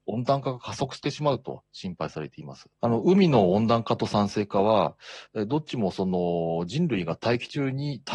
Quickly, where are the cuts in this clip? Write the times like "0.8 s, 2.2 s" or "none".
2.7 s